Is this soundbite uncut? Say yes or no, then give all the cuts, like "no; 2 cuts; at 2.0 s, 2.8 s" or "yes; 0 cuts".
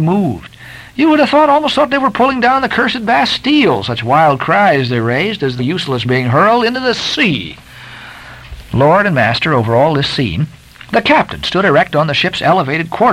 no; 3 cuts; at 5.6 s, 6.0 s, 10.9 s